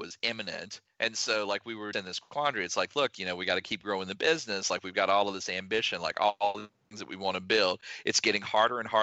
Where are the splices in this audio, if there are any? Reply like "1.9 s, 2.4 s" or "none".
1.9 s

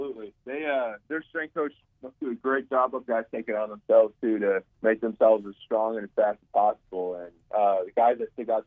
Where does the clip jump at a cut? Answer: 1.0 s, 3.1 s, 4.7 s

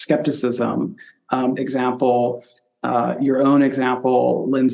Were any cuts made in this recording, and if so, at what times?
1.6 s

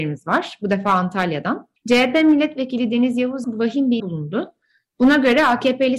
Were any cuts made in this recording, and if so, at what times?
1.8 s, 3.4 s, 4.0 s

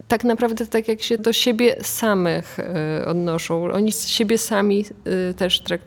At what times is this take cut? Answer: 1.2 s, 3.9 s

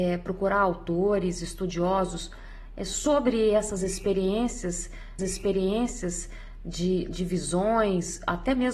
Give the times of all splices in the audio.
5.2 s

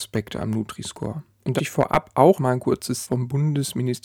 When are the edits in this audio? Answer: 1.6 s, 2.4 s, 3.0 s

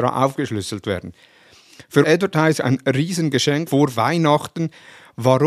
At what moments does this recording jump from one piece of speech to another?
2.0 s, 2.6 s, 3.7 s

